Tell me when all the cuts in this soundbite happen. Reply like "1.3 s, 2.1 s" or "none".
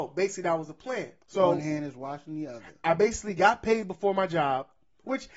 1.2 s